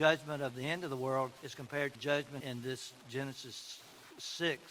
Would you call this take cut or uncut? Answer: cut